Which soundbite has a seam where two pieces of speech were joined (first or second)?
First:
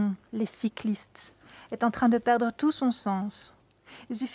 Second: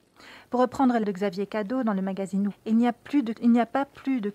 second